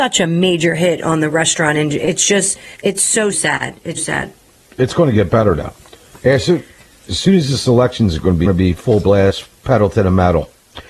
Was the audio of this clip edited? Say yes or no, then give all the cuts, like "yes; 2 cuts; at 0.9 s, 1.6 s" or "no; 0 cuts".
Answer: yes; 4 cuts; at 2.7 s, 3.3 s, 4.0 s, 8.4 s